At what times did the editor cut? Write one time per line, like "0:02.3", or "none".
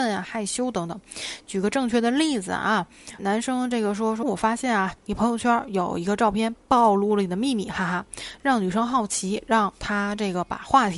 0:03.2
0:04.2
0:05.0